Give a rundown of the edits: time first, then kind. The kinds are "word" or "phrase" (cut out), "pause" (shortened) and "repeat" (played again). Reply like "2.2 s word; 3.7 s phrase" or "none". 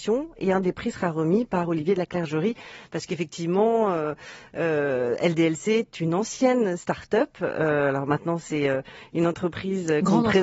none

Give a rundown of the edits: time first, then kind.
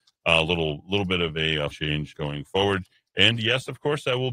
1.7 s word; 2.1 s word

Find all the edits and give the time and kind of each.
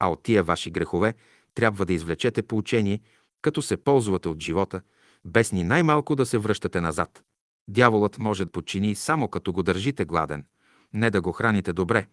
8.5 s word

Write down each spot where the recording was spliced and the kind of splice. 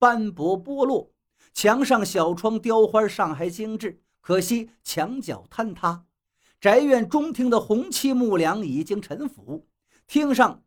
none

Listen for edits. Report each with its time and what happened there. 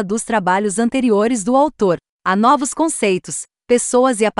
none

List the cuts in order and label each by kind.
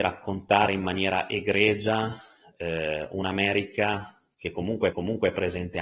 4.9 s repeat

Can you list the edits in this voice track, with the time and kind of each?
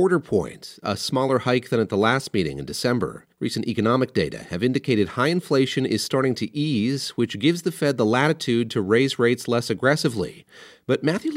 3.3 s pause

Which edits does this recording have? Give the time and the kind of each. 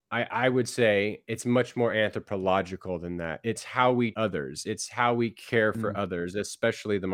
4.1 s word

